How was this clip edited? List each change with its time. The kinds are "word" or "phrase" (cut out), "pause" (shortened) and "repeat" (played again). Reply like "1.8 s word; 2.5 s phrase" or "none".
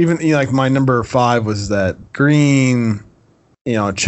2.1 s pause